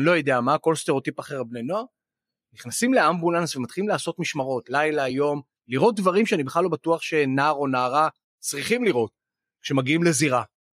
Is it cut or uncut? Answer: uncut